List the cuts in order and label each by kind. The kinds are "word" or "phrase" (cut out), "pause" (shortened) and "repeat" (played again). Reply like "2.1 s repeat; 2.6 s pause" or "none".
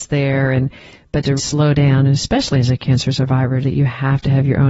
1.4 s word; 3.6 s word